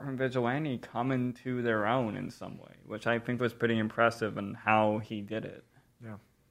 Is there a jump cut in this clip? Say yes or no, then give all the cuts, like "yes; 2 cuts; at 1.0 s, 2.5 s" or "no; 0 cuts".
no; 0 cuts